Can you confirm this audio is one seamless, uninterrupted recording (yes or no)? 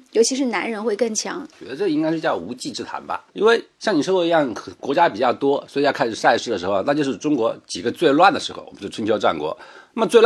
no